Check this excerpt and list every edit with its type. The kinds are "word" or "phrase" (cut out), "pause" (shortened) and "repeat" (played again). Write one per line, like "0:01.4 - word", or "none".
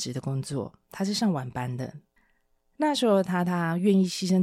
none